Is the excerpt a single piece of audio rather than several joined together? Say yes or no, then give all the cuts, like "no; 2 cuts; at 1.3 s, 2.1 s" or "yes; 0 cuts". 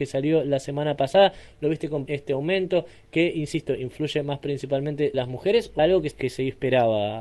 no; 4 cuts; at 2.1 s, 5.1 s, 5.8 s, 6.1 s